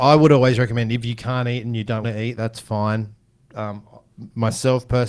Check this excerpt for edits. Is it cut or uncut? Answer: cut